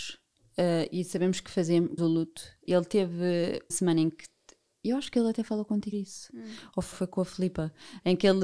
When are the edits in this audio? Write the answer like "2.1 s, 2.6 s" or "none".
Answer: 2.0 s, 2.7 s, 3.7 s, 5.9 s, 6.9 s

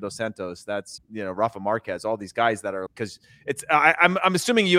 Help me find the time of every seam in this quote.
1.0 s, 2.9 s

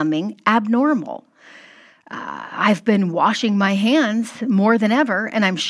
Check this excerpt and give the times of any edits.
none

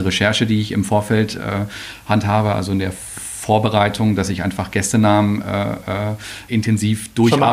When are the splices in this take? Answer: 6.5 s

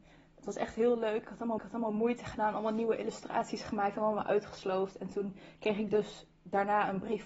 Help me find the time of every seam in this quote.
1.6 s

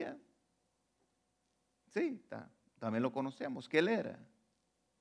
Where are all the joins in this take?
none

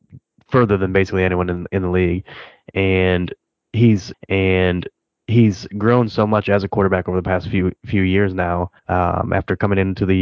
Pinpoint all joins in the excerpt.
4.1 s, 7.8 s, 8.8 s

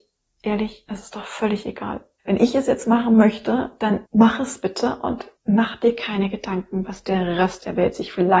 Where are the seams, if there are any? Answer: 4.1 s, 5.4 s

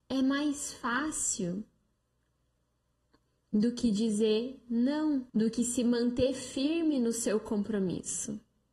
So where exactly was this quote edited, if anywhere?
5.3 s

